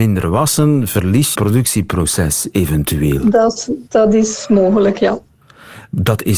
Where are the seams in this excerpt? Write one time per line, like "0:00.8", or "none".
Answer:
0:01.3
0:03.9